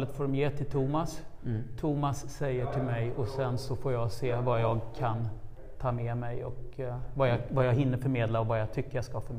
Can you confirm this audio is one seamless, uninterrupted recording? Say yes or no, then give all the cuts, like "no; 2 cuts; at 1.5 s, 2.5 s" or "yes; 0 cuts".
yes; 0 cuts